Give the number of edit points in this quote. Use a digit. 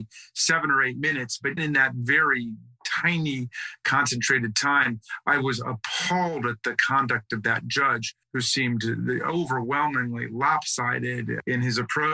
2